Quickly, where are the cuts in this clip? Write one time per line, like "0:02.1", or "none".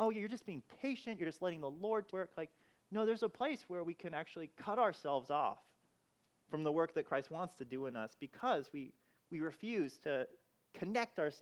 0:02.1